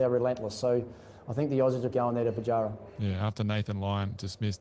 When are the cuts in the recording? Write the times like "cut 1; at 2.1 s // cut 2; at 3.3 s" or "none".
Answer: cut 1; at 1.9 s